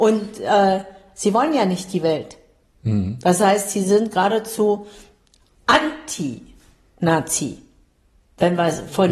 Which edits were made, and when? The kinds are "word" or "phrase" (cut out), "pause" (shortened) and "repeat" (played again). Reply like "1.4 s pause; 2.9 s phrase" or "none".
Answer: none